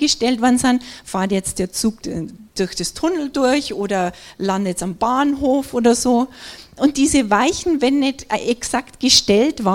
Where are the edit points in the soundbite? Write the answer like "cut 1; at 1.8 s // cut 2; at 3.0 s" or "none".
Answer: cut 1; at 2.0 s